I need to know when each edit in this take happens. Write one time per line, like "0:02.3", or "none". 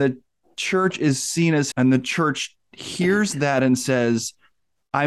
0:01.7